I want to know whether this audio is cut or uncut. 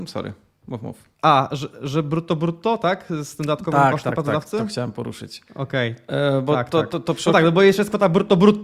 cut